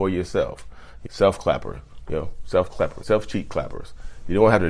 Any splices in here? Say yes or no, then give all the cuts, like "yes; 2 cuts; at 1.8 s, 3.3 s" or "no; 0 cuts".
yes; 2 cuts; at 1.1 s, 3.0 s